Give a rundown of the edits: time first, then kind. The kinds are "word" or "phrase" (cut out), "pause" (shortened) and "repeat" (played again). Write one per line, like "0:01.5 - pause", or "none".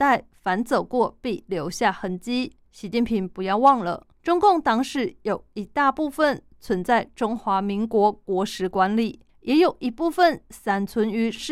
0:02.6 - pause
0:04.1 - pause
0:09.3 - pause